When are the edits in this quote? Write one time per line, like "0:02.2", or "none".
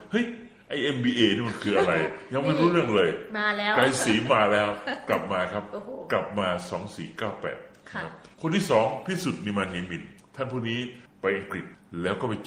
0:08.3